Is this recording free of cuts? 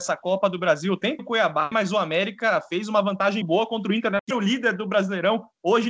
no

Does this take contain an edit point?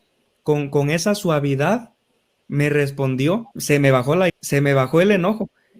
yes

